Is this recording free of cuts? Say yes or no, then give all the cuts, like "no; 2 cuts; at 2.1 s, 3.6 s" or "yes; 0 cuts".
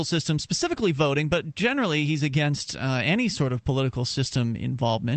yes; 0 cuts